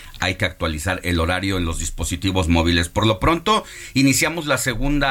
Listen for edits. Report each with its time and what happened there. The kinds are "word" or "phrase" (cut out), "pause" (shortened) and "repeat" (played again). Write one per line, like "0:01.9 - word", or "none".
none